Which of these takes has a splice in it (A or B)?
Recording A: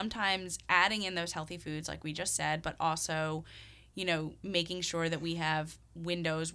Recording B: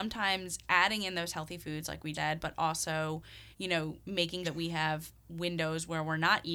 B